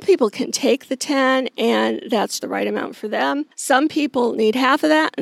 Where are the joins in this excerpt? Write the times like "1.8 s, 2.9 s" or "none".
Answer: 2.4 s, 3.5 s